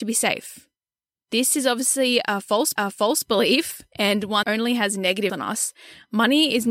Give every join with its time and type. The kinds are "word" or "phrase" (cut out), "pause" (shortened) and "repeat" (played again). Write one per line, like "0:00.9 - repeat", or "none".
0:01.1 - pause
0:02.8 - repeat
0:04.4 - word
0:05.3 - word